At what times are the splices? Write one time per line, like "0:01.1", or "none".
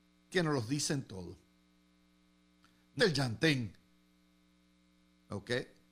0:03.0